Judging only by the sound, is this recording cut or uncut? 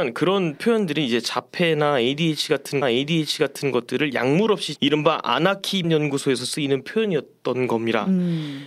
cut